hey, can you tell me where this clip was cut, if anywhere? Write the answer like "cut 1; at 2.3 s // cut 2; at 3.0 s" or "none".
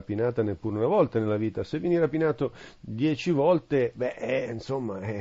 none